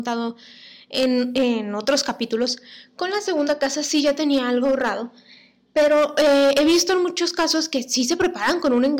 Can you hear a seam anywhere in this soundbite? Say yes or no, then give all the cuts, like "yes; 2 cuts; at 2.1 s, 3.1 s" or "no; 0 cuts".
no; 0 cuts